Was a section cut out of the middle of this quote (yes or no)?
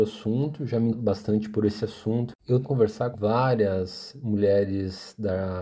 yes